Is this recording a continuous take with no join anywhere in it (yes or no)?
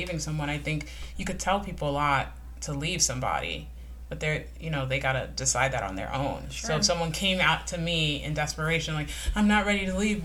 yes